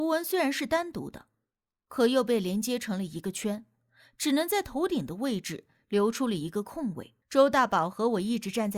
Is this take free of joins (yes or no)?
no